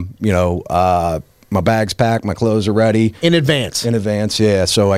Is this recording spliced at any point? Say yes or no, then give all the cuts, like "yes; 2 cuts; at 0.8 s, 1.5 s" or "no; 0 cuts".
no; 0 cuts